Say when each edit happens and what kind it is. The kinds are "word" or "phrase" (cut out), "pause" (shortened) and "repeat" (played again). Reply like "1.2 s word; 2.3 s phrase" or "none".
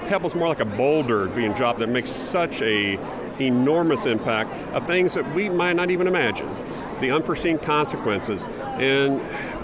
1.8 s phrase